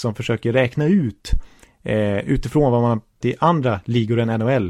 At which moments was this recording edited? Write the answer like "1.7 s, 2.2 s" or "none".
3.2 s